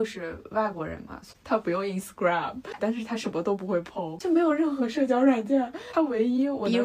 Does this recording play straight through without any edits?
no; 1 cut; at 2.8 s

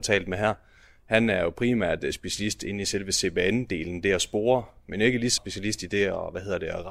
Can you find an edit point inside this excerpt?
yes; 1 cut; at 5.4 s

